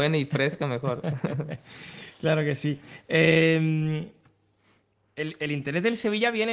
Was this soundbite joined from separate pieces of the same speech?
no; 0 cuts

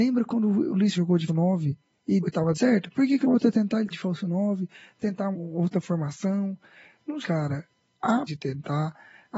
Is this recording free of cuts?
no; 9 cuts; at 0.9 s, 1.3 s, 2.2 s, 2.5 s, 3.2 s, 3.9 s, 5.3 s, 7.2 s, 8.3 s

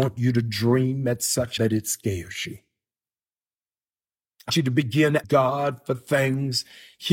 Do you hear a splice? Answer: yes; 3 cuts; at 1.6 s, 4.5 s, 5.2 s

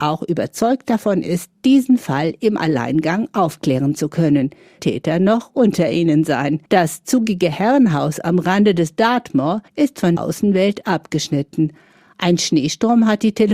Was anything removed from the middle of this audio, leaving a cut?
yes; 4 cuts; at 4.8 s, 6.7 s, 9.7 s, 10.2 s

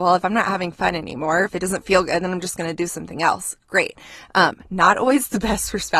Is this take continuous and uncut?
yes; 0 cuts

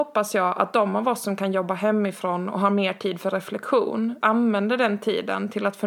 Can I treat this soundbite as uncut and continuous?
no; 1 cut; at 4.2 s

